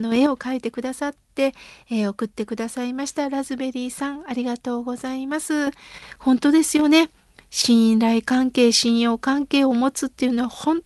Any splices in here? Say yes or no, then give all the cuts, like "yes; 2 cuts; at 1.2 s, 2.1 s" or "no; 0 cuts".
no; 0 cuts